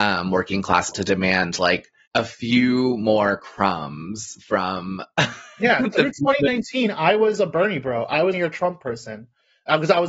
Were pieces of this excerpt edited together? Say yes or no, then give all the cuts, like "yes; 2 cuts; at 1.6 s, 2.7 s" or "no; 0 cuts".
yes; 3 cuts; at 0.9 s, 2.1 s, 8.3 s